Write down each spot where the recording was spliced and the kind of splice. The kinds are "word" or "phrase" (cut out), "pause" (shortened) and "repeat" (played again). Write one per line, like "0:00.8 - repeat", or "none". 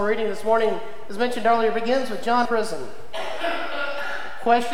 0:02.5 - word